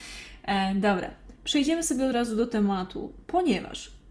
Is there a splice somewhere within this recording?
no; 0 cuts

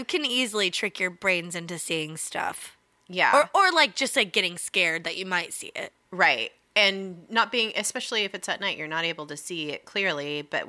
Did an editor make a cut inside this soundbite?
yes; 1 cut; at 6.0 s

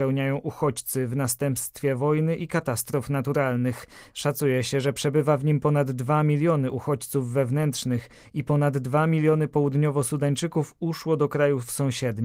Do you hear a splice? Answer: no; 0 cuts

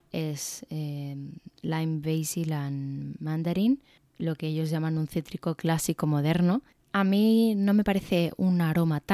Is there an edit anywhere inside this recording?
yes; 1 cut; at 6.7 s

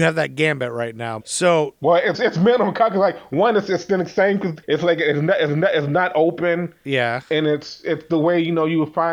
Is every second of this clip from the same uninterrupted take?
no; 4 cuts; at 1.2 s, 2.1 s, 4.6 s, 5.5 s

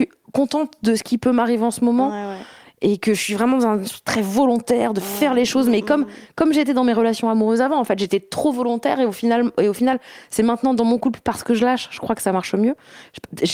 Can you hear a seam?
no; 0 cuts

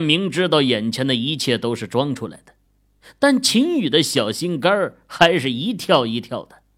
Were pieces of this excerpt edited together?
no; 0 cuts

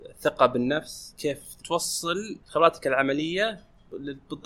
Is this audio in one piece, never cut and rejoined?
yes; 0 cuts

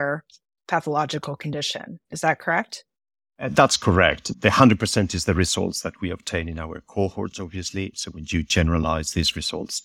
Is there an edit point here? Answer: yes; 1 cut; at 2.0 s

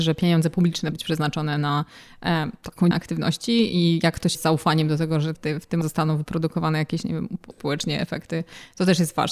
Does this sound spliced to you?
yes; 6 cuts; at 0.9 s, 2.9 s, 4.3 s, 5.3 s, 5.8 s, 7.5 s

